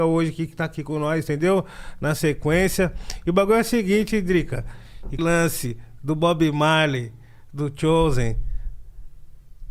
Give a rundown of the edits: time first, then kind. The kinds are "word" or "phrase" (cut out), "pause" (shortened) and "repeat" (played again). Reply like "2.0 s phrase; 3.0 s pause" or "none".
5.2 s phrase